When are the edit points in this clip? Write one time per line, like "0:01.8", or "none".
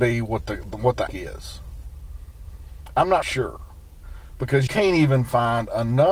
0:01.1
0:03.2
0:04.7